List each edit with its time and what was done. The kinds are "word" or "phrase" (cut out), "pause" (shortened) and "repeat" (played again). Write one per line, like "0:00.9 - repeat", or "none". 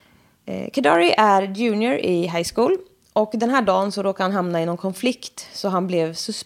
none